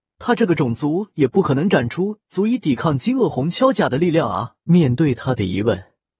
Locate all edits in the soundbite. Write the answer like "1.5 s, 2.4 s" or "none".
4.6 s